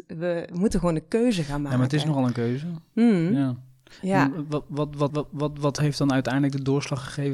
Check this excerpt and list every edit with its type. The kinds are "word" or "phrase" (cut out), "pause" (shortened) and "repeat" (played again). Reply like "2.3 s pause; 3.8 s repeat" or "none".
5.1 s repeat

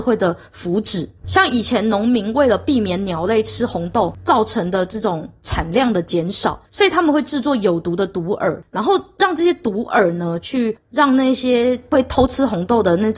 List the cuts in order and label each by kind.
1.2 s pause; 6.6 s pause

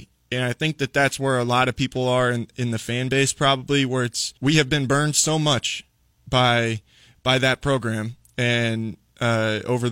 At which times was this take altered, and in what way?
4.4 s pause

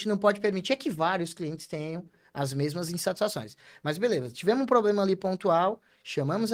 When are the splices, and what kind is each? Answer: none

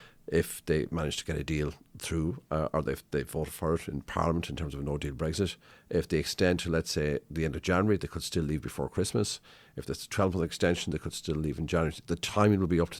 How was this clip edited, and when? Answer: none

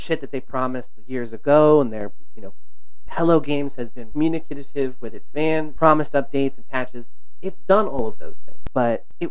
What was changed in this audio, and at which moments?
3.1 s word; 4.1 s word; 5.8 s word

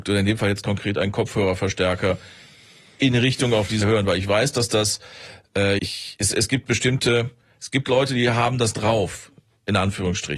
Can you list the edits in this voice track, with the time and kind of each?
3.8 s word; 5.8 s word

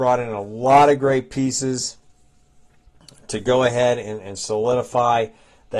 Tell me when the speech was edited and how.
none

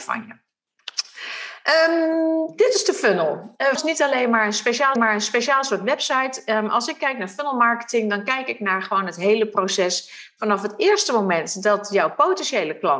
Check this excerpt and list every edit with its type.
3.8 s word; 5.0 s repeat

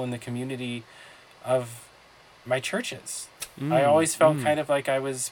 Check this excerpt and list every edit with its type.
none

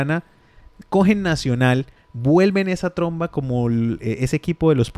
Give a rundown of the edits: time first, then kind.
2.0 s pause

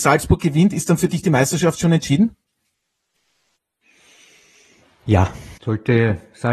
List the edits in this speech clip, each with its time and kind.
5.6 s pause

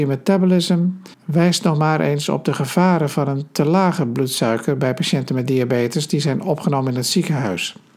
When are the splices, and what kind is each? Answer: 1.1 s pause

